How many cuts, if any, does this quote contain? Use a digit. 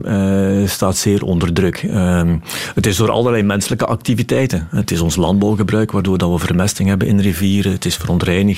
0